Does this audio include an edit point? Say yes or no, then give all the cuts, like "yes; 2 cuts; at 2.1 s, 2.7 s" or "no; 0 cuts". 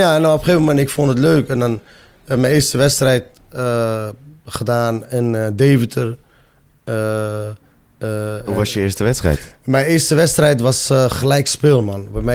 no; 0 cuts